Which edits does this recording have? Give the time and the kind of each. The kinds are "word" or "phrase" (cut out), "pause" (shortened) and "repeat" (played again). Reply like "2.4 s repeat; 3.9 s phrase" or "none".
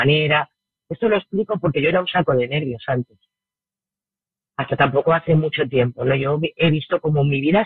none